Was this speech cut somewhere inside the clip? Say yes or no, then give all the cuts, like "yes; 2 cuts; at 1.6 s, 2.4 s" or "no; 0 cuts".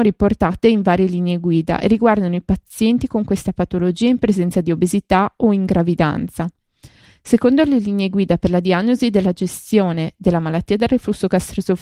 no; 0 cuts